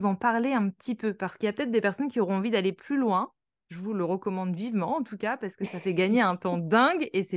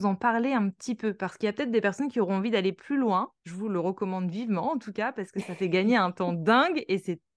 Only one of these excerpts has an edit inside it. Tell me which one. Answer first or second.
second